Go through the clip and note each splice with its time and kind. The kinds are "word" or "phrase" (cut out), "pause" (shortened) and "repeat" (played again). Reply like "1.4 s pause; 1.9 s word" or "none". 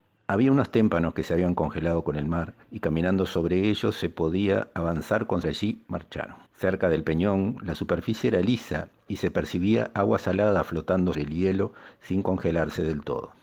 2.6 s pause; 5.4 s phrase; 6.5 s pause; 11.1 s word

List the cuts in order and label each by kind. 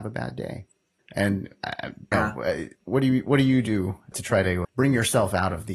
1.0 s pause; 2.1 s phrase; 2.8 s pause; 4.1 s word; 4.6 s word

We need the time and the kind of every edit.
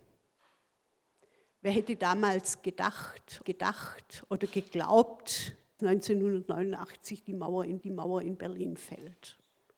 3.4 s repeat; 5.8 s word; 7.8 s repeat

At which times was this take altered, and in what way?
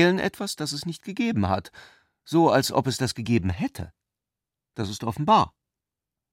none

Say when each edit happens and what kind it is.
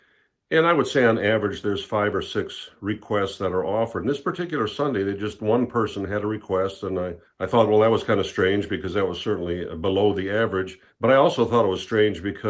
7.2 s pause; 10.9 s pause

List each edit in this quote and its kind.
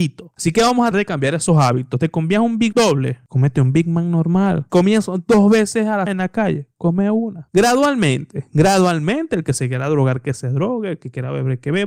0.9 s word; 2.7 s word; 6.1 s word

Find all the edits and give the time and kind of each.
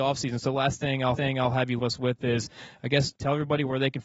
1.1 s repeat; 1.8 s word; 3.2 s pause

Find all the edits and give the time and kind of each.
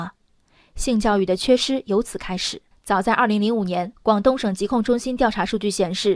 2.7 s pause; 4.0 s pause

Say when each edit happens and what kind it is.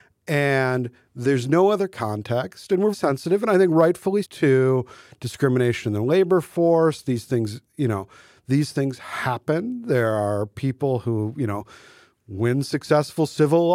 2.9 s word; 4.2 s word

